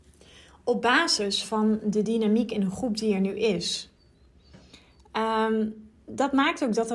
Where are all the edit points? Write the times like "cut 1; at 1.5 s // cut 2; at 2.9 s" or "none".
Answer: none